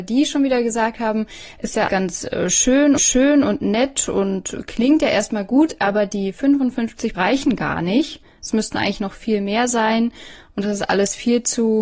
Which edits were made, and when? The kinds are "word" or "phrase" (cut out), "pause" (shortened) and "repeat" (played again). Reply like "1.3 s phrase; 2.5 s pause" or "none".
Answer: 1.9 s word; 3.0 s repeat; 7.1 s word